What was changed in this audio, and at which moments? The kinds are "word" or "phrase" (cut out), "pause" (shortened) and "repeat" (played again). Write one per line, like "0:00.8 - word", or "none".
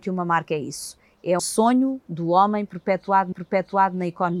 0:01.4 - word
0:03.3 - repeat